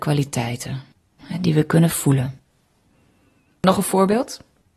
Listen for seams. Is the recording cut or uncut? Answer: uncut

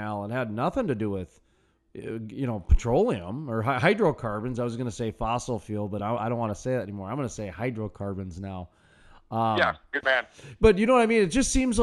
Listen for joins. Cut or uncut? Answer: uncut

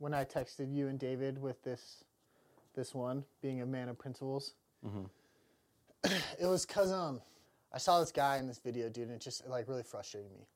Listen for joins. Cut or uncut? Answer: uncut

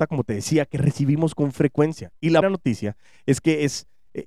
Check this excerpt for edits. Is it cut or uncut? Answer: cut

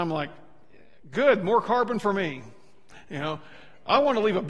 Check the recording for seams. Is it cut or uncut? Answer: uncut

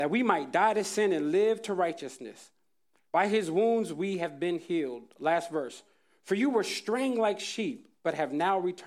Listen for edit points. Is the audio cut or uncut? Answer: uncut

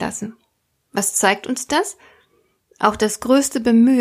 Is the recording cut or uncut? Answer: uncut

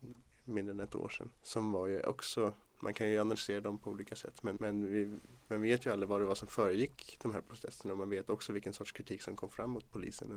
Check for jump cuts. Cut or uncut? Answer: cut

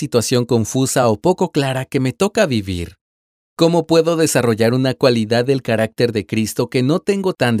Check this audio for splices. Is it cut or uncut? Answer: uncut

